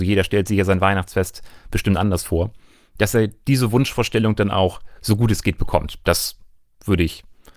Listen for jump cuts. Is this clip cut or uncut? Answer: uncut